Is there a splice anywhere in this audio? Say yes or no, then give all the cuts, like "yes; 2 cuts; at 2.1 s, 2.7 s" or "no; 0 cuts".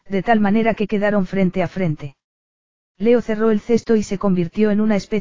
no; 0 cuts